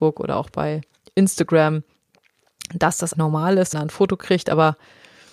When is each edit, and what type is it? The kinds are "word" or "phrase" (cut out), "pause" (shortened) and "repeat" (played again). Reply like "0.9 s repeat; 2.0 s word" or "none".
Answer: 3.1 s word; 3.7 s phrase